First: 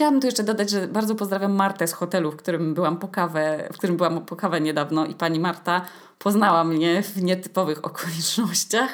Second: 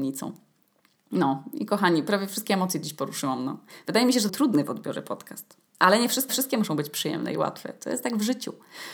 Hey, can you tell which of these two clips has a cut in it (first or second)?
second